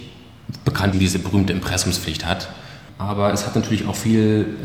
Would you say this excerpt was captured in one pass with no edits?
no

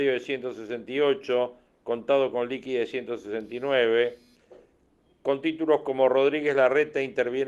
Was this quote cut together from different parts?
no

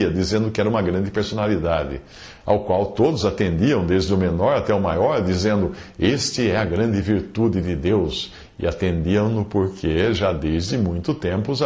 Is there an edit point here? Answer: no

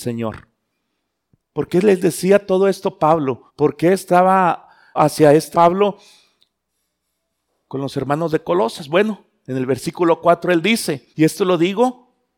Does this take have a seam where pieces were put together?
yes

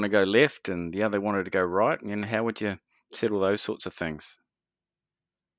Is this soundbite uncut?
yes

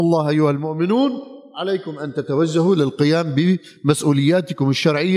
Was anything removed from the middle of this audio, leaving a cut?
no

